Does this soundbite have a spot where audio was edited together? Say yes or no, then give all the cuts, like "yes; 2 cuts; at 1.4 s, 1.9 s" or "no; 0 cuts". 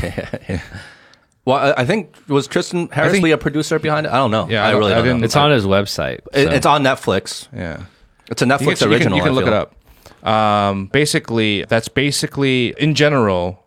yes; 4 cuts; at 3.2 s, 10.9 s, 11.6 s, 12.7 s